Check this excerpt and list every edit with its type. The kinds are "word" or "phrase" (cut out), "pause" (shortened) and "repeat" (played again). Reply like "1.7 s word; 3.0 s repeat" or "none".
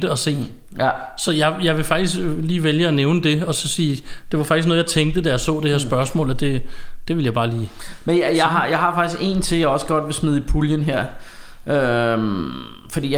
none